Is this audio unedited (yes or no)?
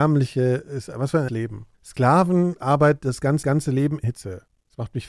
no